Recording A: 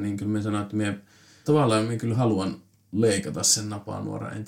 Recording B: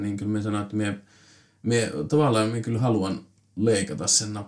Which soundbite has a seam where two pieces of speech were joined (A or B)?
A